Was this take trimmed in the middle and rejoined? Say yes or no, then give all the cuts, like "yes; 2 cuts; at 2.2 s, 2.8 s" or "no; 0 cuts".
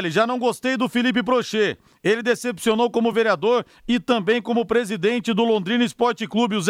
no; 0 cuts